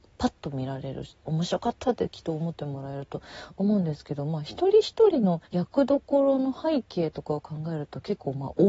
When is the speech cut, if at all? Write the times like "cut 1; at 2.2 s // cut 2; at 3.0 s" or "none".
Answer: cut 1; at 5.4 s